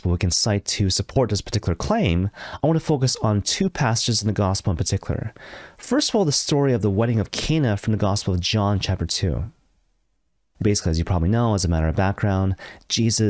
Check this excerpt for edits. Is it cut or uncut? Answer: cut